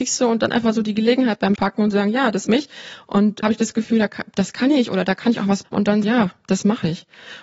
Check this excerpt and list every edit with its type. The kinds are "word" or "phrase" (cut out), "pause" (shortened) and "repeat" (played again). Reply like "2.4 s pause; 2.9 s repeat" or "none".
1.6 s word; 2.5 s word; 3.4 s word; 5.6 s word; 6.0 s word